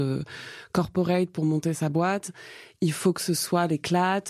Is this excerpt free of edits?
yes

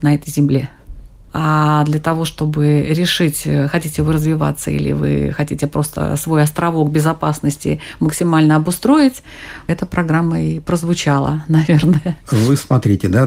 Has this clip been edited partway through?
no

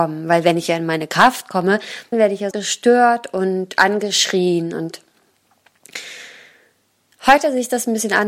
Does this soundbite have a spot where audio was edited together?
yes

